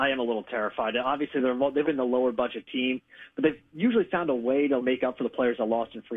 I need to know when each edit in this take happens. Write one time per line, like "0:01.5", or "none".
0:01.8
0:04.8